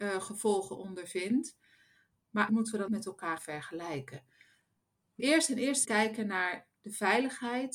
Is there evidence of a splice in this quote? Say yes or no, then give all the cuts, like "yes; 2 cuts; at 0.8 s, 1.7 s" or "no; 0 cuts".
yes; 5 cuts; at 2.5 s, 2.9 s, 3.4 s, 5.2 s, 5.8 s